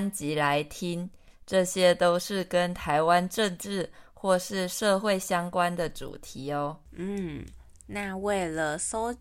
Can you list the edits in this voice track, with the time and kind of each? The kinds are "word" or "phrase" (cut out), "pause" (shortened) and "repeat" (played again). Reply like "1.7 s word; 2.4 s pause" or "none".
6.8 s pause